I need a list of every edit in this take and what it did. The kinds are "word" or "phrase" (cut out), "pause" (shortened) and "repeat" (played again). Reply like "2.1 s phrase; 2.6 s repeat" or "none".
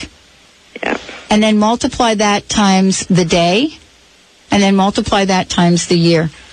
none